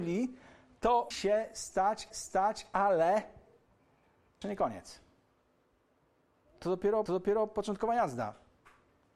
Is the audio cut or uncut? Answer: cut